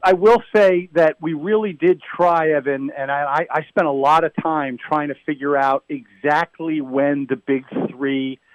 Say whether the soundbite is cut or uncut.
uncut